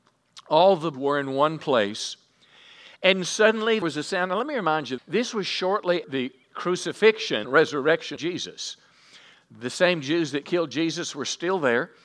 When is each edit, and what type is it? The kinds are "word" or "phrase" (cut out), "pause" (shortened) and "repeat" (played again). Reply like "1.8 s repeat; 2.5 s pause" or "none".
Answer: 0.9 s word; 3.8 s word; 5.0 s word; 6.0 s word; 7.4 s word; 8.2 s word